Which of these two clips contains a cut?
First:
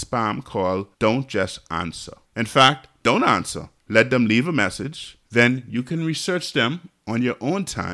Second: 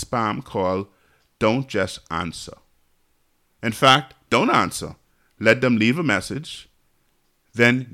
first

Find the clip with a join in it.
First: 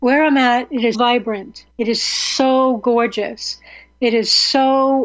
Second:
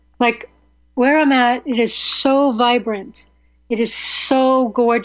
first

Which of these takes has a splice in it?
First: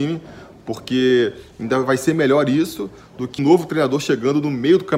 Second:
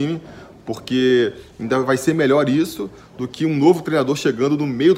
first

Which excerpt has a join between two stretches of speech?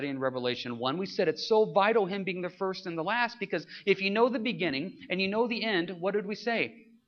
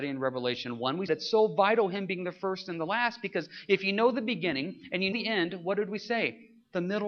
second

